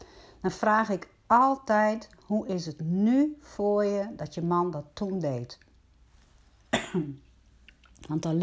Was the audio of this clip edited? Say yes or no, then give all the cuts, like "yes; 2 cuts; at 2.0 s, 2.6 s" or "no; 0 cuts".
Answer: no; 0 cuts